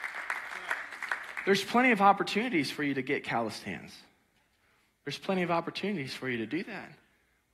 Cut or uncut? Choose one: uncut